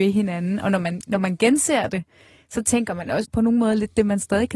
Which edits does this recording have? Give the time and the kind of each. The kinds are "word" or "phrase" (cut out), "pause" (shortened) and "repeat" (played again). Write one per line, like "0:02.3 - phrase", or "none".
0:03.2 - word